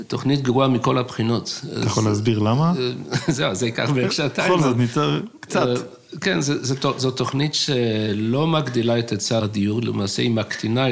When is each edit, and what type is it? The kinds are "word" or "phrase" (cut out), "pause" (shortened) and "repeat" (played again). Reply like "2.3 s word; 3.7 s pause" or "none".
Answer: none